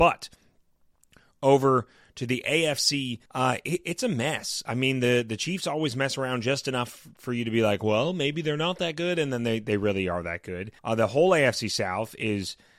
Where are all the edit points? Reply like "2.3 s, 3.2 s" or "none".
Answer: 3.3 s, 10.8 s